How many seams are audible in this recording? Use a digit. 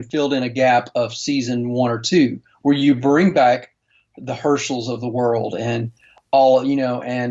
0